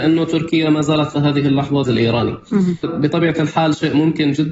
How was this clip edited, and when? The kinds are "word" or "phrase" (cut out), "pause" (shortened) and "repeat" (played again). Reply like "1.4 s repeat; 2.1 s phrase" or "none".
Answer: 1.1 s word; 1.8 s phrase; 2.8 s word